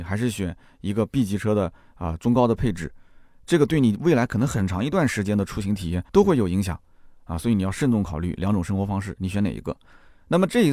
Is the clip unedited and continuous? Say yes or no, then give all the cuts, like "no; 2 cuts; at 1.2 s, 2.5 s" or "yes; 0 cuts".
no; 1 cut; at 6.1 s